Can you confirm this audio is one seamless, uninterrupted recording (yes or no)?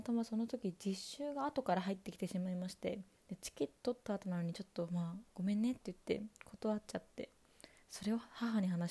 no